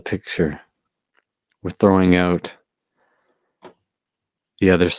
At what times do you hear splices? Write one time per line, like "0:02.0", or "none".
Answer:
none